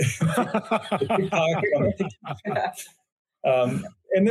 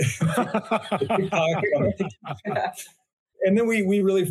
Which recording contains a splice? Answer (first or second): second